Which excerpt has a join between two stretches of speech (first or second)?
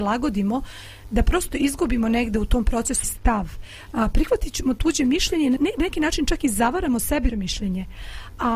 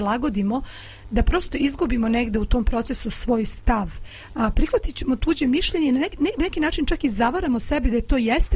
first